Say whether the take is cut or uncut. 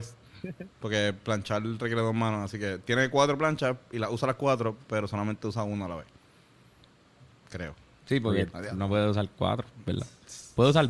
uncut